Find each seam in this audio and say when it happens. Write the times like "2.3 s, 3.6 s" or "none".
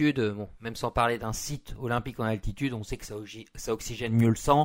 none